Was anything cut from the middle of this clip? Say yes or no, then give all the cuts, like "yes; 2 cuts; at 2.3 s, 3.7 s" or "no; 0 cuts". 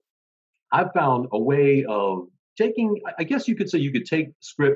yes; 1 cut; at 2.4 s